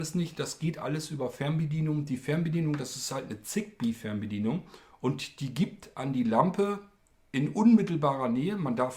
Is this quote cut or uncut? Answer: uncut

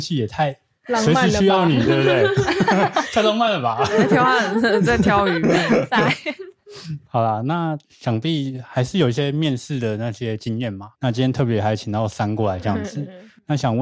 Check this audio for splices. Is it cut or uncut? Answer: cut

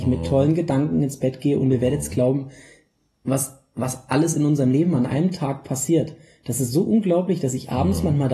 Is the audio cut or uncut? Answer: uncut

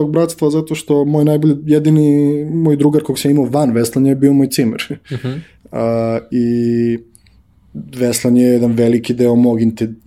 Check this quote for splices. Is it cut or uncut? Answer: uncut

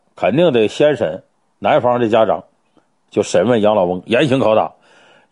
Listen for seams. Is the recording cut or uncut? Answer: uncut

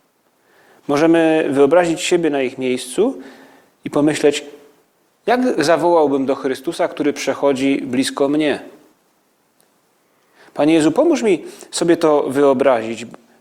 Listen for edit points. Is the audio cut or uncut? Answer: uncut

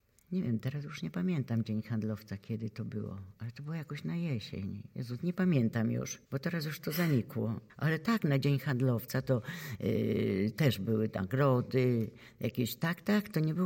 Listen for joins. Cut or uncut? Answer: cut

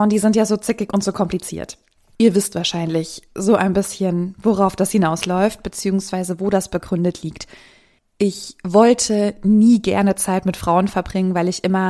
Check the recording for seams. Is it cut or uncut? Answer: uncut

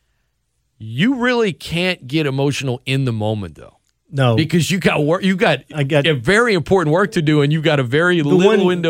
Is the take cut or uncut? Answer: uncut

